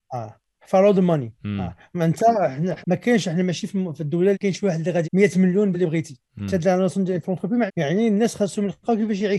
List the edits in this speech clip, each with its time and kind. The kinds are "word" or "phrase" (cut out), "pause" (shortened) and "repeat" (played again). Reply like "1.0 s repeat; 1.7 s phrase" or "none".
1.4 s pause; 2.8 s word; 4.3 s word; 5.0 s phrase; 5.7 s phrase; 6.3 s pause; 7.2 s phrase; 7.7 s word

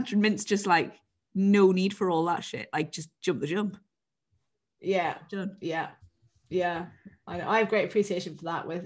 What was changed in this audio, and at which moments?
none

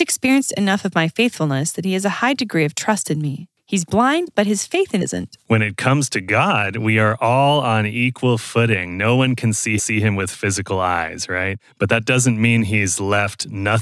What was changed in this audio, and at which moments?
5.0 s word; 9.8 s repeat

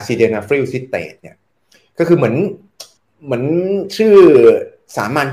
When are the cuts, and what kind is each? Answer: 3.0 s pause

